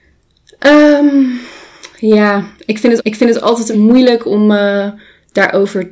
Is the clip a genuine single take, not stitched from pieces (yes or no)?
no